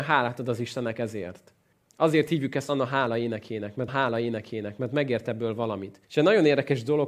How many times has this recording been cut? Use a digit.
3